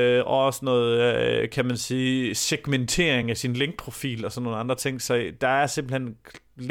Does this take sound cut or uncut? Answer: uncut